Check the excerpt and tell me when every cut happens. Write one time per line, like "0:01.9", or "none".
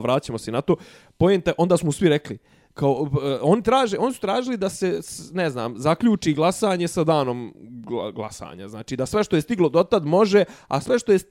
none